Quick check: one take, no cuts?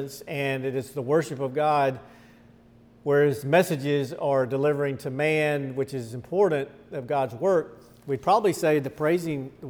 yes; 0 cuts

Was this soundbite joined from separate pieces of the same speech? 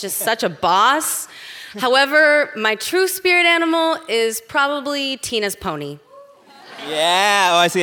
no; 0 cuts

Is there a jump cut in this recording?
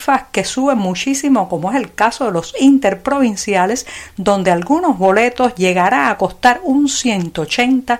yes; 1 cut; at 2.5 s

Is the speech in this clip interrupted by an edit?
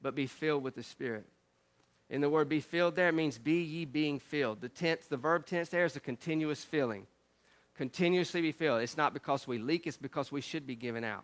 no; 0 cuts

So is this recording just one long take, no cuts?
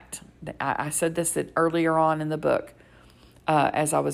yes; 0 cuts

